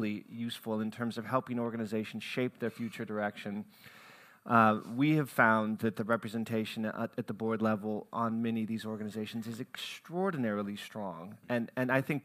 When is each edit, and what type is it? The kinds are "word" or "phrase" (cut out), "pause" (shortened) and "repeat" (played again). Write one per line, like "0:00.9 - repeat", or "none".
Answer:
none

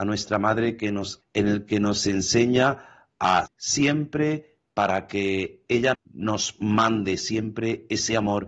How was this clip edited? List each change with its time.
0:01.2 - word
0:03.5 - word
0:05.9 - word

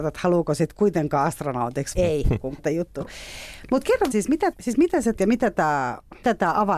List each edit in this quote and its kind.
0:02.0 - word
0:02.6 - word
0:04.1 - word
0:04.5 - word
0:05.1 - word

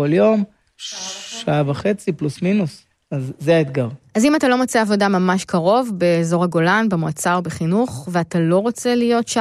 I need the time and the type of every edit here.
none

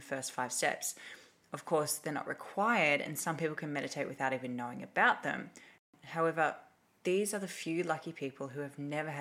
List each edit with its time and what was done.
none

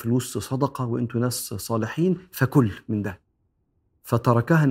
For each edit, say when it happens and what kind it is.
none

